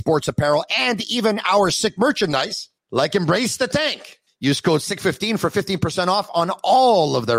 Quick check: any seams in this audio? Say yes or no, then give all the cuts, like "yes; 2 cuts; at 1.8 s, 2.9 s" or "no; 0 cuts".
yes; 2 cuts; at 2.8 s, 4.3 s